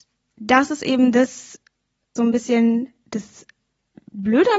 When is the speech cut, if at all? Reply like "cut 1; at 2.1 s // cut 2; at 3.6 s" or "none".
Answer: cut 1; at 2.2 s